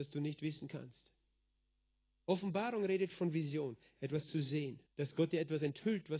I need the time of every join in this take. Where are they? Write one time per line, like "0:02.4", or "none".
0:04.9